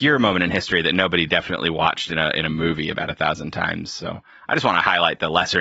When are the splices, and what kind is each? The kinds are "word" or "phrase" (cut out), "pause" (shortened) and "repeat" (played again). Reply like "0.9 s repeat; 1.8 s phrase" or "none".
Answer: none